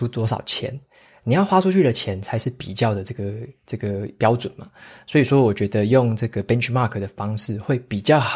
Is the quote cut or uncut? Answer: uncut